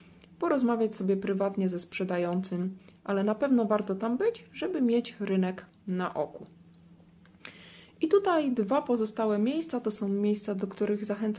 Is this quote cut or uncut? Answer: uncut